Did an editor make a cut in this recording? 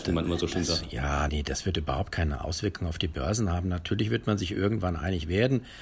yes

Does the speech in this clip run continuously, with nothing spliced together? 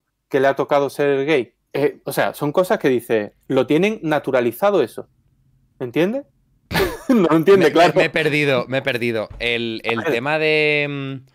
no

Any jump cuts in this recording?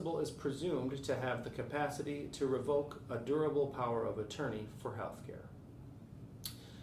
no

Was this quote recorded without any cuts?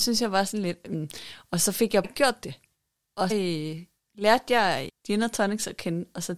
no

